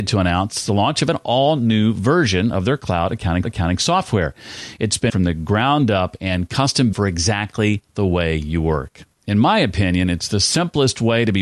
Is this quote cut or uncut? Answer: cut